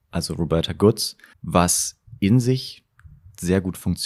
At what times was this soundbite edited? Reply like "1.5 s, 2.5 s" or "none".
1.3 s